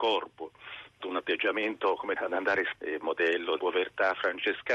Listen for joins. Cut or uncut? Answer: cut